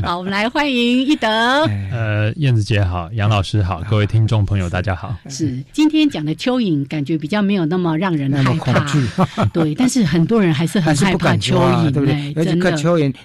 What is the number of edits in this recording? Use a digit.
1